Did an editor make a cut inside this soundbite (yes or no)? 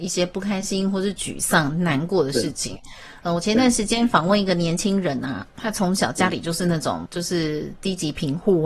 yes